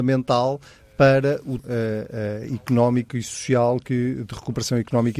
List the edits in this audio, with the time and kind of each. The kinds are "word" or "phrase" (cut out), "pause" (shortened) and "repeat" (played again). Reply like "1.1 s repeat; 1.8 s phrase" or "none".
1.6 s phrase